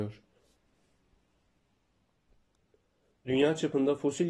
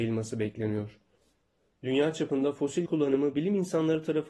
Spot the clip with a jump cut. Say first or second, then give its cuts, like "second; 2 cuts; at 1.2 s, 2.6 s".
second; 2 cuts; at 1.4 s, 2.9 s